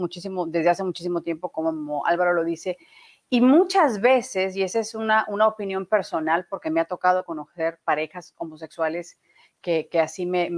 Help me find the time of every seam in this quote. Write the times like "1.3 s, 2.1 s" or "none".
1.5 s